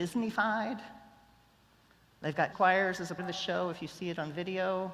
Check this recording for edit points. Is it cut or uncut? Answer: cut